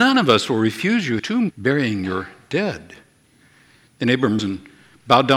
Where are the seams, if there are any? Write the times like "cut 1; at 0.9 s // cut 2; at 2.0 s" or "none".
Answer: cut 1; at 1.2 s // cut 2; at 1.5 s // cut 3; at 4.4 s